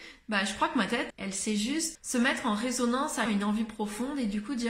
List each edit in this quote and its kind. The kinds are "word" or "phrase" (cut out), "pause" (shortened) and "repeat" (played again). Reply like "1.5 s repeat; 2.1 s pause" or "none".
1.1 s word; 1.9 s word; 3.3 s phrase